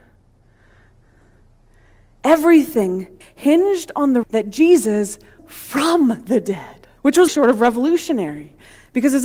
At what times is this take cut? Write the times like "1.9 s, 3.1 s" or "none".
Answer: 3.2 s, 4.2 s, 5.4 s, 7.0 s, 7.3 s